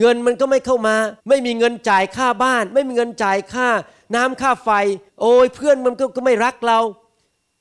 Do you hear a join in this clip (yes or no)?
yes